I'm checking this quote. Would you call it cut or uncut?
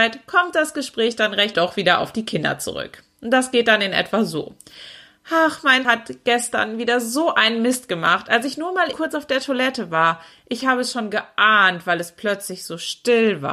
cut